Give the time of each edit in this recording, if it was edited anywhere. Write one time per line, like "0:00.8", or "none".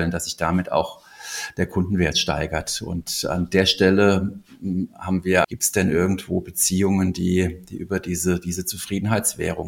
0:05.4